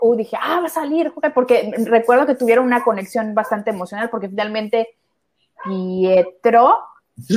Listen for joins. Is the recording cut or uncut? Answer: uncut